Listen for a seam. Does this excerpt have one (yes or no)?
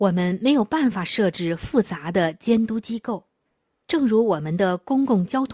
yes